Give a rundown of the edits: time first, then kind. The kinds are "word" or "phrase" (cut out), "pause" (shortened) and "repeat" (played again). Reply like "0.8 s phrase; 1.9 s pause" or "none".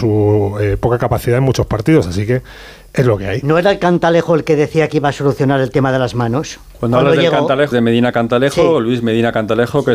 7.7 s word